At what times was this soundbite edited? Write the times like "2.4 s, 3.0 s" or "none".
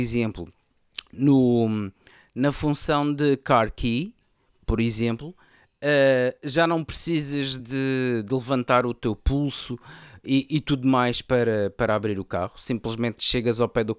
none